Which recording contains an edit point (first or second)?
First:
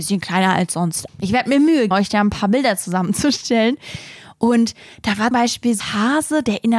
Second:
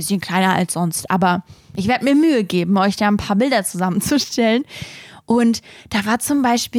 first